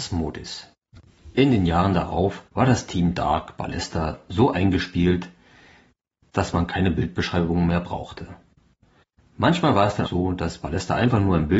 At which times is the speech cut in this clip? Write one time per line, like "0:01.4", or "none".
0:02.5
0:10.0